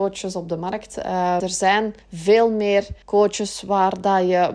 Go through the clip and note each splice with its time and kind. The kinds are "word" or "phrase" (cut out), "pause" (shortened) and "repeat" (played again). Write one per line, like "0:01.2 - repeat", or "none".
0:01.4 - word
0:02.0 - pause
0:03.0 - pause